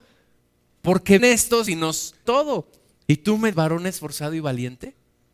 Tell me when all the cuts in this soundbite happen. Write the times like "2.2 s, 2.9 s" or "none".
1.2 s, 1.7 s, 2.3 s, 3.5 s

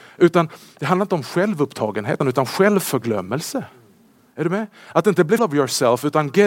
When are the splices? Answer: 2.2 s, 5.4 s

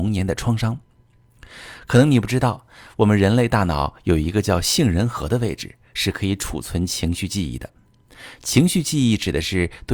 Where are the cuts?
none

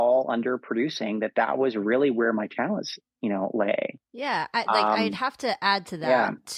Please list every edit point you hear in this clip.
none

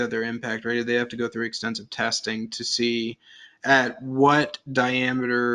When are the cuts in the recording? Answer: none

